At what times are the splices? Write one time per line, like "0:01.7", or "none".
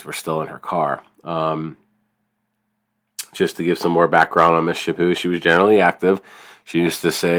none